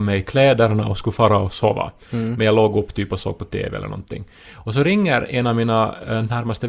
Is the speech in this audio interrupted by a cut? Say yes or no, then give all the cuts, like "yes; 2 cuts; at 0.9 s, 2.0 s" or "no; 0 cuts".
no; 0 cuts